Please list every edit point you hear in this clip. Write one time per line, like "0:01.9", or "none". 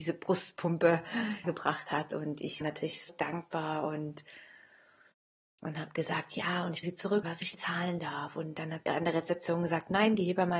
0:01.4
0:02.6
0:03.1
0:06.8
0:07.2
0:07.5
0:08.9